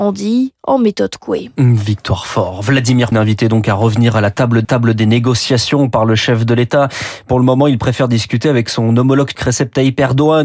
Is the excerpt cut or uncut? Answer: cut